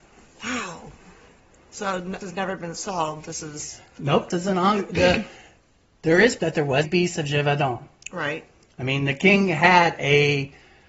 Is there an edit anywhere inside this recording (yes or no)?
yes